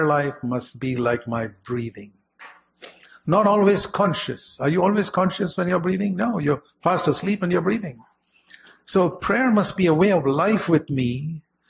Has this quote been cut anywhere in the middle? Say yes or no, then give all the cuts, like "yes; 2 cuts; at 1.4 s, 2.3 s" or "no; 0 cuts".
no; 0 cuts